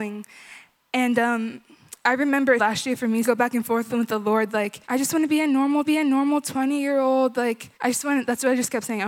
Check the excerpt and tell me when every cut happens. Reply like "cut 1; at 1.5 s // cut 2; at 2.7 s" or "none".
cut 1; at 2.6 s // cut 2; at 3.2 s // cut 3; at 3.9 s // cut 4; at 4.8 s // cut 5; at 5.8 s // cut 6; at 7.7 s